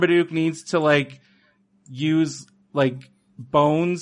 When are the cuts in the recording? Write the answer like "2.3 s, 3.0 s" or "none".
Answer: none